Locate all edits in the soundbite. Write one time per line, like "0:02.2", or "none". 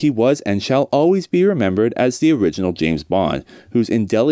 none